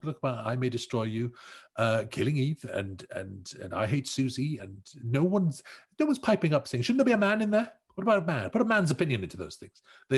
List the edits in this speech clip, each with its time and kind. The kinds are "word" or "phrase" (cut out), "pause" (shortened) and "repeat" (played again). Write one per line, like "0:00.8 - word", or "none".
0:04.6 - word